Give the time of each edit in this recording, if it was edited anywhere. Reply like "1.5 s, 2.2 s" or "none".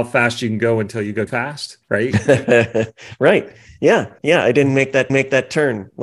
1.3 s, 1.8 s, 4.2 s, 5.1 s